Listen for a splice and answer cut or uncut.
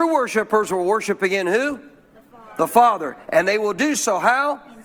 uncut